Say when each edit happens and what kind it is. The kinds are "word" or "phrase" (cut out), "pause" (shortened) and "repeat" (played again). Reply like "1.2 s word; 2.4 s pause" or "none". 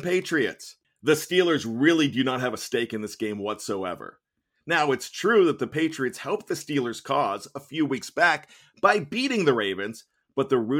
none